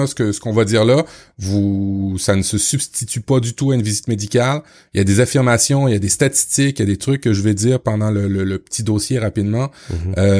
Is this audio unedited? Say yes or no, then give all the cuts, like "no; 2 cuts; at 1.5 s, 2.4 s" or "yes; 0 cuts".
yes; 0 cuts